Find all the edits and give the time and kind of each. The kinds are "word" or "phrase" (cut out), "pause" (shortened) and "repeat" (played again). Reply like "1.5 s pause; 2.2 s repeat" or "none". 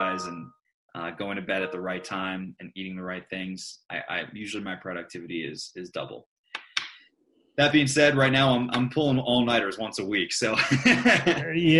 none